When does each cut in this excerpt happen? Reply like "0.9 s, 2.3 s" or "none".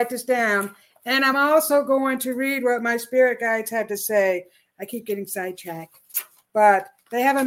none